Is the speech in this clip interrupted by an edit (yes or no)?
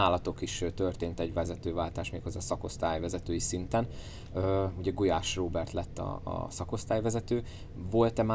no